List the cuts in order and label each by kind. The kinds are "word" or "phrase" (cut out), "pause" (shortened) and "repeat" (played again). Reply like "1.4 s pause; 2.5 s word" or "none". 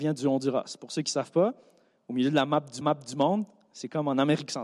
2.8 s repeat